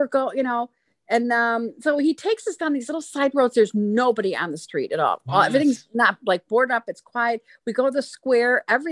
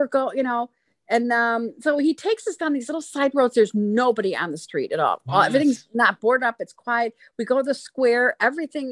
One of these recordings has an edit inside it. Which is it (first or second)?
second